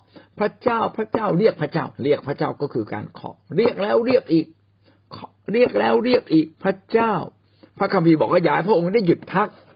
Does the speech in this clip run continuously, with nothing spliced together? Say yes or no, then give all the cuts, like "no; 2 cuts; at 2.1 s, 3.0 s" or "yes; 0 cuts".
no; 2 cuts; at 1.9 s, 6.5 s